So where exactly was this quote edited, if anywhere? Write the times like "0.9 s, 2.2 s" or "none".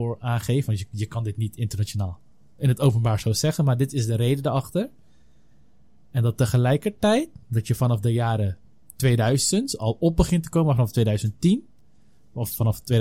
none